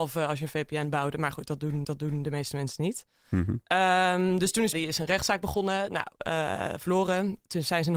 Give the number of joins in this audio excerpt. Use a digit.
2